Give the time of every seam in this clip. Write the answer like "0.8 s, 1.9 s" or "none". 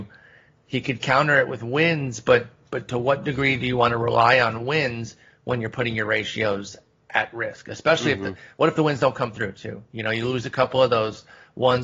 none